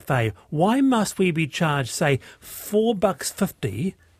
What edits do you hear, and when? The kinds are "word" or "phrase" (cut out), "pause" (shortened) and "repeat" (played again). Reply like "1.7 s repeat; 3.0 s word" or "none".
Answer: none